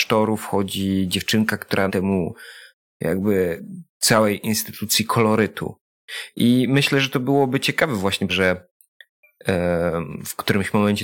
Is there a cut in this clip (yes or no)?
yes